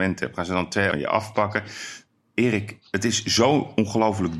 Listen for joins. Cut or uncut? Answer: cut